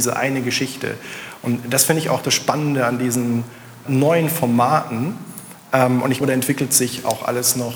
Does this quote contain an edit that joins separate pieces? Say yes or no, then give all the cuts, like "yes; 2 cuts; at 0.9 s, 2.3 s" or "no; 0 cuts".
yes; 2 cuts; at 3.9 s, 6.2 s